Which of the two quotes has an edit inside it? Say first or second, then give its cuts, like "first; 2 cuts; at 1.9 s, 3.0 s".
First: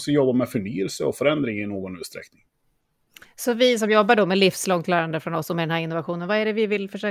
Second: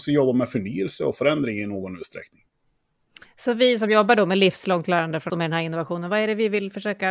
second; 1 cut; at 5.3 s